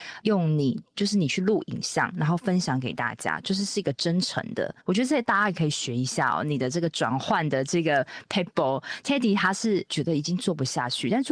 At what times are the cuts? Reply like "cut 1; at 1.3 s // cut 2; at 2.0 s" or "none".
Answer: cut 1; at 4.8 s // cut 2; at 9.0 s